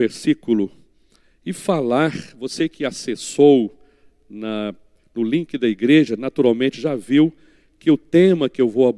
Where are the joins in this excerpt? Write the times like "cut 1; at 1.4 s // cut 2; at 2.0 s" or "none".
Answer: none